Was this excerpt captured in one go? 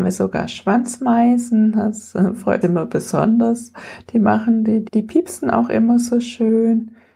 no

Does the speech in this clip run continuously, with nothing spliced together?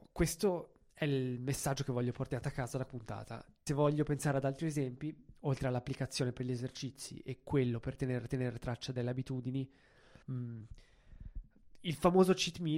no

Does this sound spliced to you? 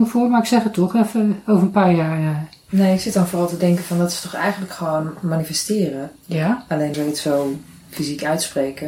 yes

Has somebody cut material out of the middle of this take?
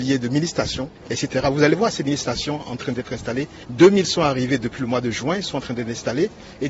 no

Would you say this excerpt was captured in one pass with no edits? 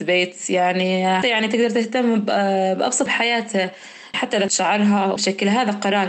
no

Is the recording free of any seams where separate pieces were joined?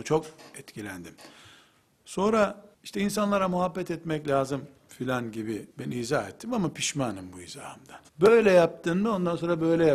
no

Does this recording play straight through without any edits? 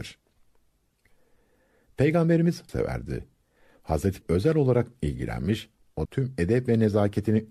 no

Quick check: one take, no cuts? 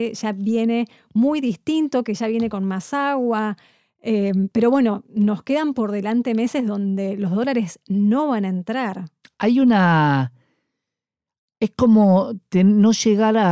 yes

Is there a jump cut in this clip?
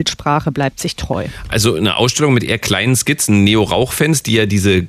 no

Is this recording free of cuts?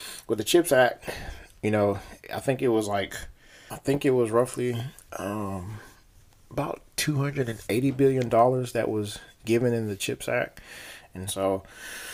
yes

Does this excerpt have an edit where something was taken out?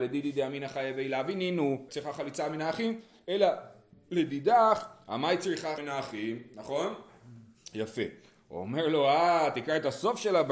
yes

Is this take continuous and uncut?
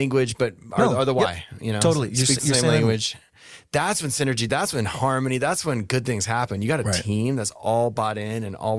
yes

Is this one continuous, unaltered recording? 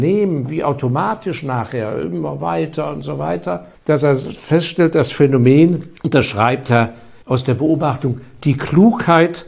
no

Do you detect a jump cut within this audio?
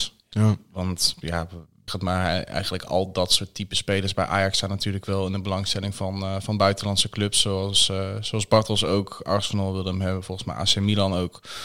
yes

